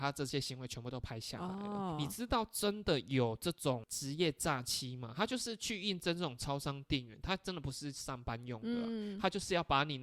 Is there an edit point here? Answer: no; 0 cuts

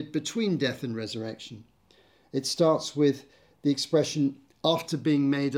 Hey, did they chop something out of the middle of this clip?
no; 0 cuts

